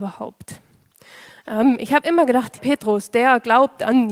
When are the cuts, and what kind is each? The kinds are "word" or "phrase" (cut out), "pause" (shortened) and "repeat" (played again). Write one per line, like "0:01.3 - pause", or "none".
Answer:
0:02.6 - phrase